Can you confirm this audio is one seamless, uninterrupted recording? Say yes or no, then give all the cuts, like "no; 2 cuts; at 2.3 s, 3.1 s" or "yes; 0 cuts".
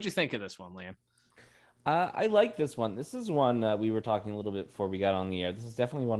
yes; 0 cuts